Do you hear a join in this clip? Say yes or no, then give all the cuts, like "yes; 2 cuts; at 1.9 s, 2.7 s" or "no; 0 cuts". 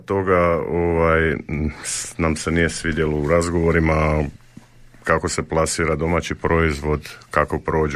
no; 0 cuts